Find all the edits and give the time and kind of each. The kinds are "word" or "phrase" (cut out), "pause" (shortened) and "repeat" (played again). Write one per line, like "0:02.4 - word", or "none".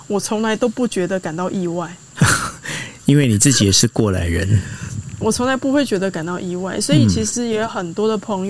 0:05.2 - word